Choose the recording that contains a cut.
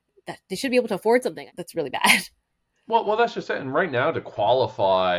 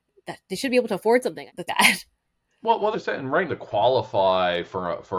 second; 3 cuts; at 1.7 s, 2.9 s, 3.5 s

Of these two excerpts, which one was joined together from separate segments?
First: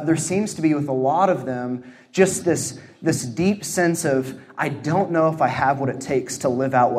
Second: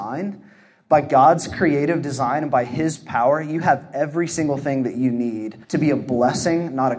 second; 1 cut; at 5.6 s

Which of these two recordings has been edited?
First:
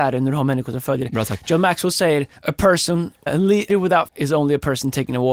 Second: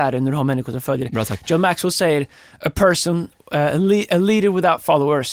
first; 4 cuts; at 2.4 s, 3.3 s, 3.7 s, 4.1 s

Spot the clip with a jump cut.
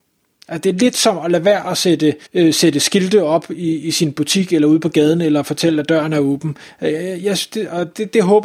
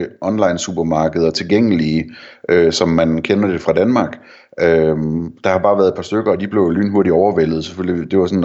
first; 1 cut; at 2.3 s

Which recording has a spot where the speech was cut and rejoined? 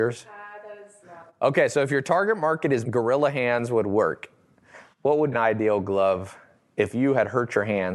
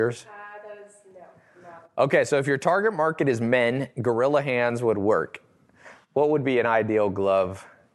first; 3 cuts; at 1.0 s, 2.8 s, 5.3 s

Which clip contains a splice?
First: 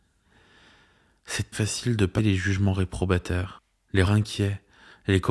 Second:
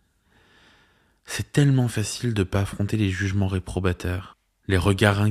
first; 3 cuts; at 1.5 s, 2.2 s, 4.0 s

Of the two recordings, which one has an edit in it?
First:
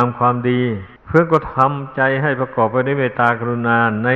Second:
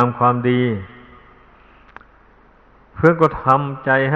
first; 1 cut; at 1.0 s

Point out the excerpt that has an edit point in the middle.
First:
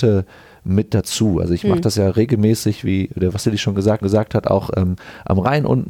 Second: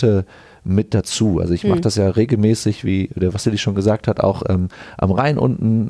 first; 1 cut; at 4.0 s

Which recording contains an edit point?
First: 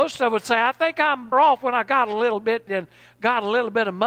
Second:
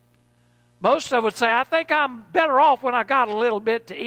first; 2 cuts; at 1.3 s, 2.7 s

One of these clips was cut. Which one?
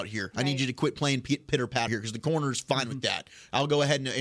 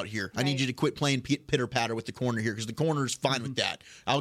first; 1 cut; at 1.9 s

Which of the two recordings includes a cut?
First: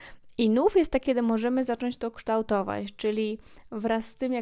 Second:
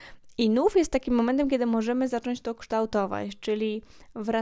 first; 1 cut; at 1.1 s

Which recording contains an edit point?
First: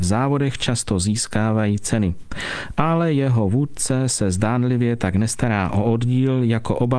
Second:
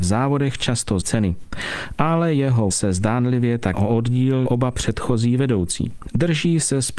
second; 4 cuts; at 1.0 s, 2.7 s, 3.7 s, 4.5 s

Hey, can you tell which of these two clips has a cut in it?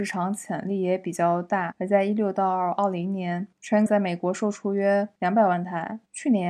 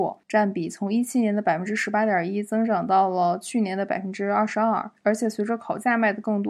first; 1 cut; at 3.9 s

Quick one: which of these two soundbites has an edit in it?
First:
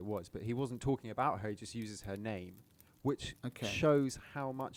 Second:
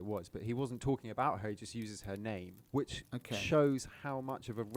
second; 1 cut; at 2.7 s

